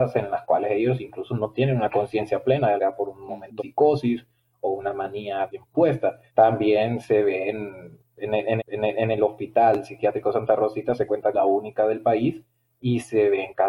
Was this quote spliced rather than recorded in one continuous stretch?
yes; 6 cuts; at 2.8 s, 3.6 s, 5.5 s, 6.3 s, 8.6 s, 11.3 s

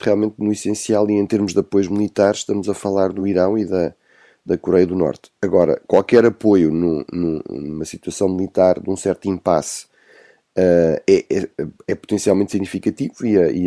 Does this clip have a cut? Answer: no; 0 cuts

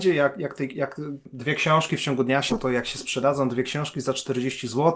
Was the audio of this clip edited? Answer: yes; 1 cut; at 2.5 s

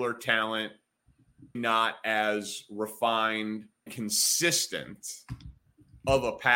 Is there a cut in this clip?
yes; 2 cuts; at 1.5 s, 3.9 s

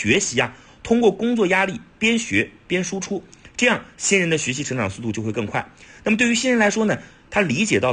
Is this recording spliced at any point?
no; 0 cuts

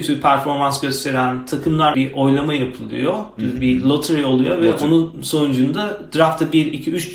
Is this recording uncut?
no; 1 cut; at 1.9 s

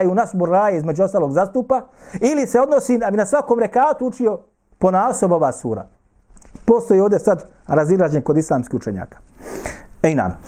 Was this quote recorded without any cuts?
no; 1 cut; at 4.6 s

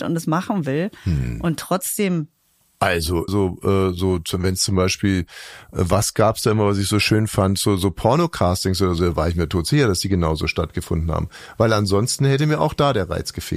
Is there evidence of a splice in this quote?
yes; 1 cut; at 3.3 s

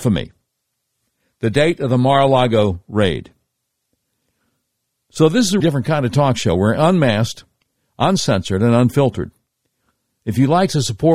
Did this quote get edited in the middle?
yes; 1 cut; at 5.6 s

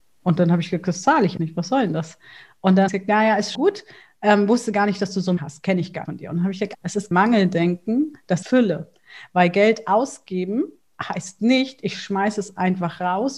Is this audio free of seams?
no; 8 cuts; at 1.4 s, 2.9 s, 3.5 s, 5.4 s, 6.0 s, 6.7 s, 7.1 s, 8.4 s

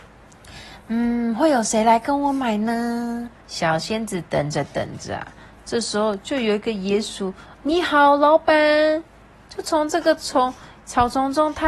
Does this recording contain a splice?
yes; 2 cuts; at 3.4 s, 7.5 s

